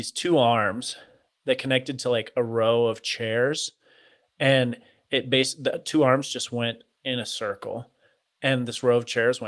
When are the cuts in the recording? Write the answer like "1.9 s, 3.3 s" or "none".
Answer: none